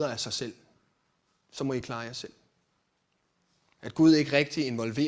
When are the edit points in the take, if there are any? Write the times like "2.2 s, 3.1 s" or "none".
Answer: none